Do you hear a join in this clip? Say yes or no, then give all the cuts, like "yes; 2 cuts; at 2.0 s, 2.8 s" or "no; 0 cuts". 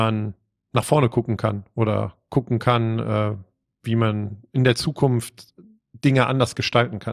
no; 0 cuts